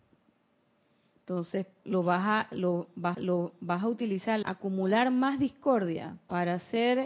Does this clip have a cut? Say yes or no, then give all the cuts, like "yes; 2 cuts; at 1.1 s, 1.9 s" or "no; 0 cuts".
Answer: yes; 3 cuts; at 1.8 s, 3.1 s, 4.4 s